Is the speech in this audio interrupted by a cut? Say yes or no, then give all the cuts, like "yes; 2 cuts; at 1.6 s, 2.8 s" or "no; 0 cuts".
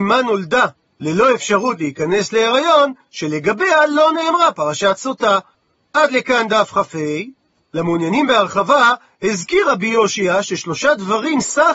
no; 0 cuts